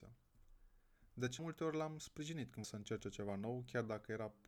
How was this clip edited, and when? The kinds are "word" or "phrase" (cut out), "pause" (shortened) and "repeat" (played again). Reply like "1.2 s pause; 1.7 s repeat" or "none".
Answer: 1.4 s word; 2.6 s word